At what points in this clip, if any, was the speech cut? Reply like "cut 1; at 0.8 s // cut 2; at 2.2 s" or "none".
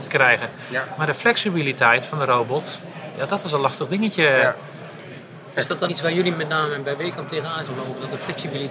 cut 1; at 5.9 s // cut 2; at 7.7 s

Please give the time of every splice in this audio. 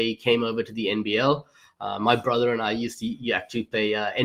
none

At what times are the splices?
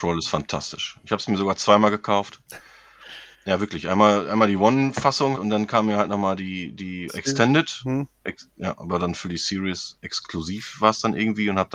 cut 1; at 3.3 s // cut 2; at 5.3 s // cut 3; at 7.1 s

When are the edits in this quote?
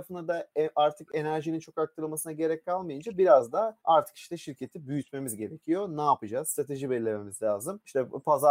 cut 1; at 3.8 s

